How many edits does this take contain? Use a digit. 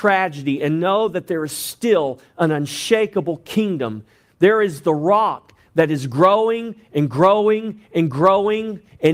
0